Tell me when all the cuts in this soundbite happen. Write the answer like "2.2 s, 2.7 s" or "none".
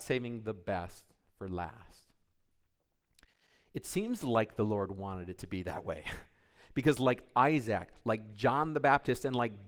none